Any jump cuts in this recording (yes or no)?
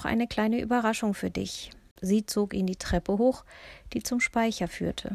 no